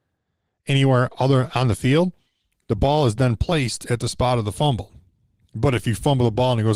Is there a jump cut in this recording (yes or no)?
no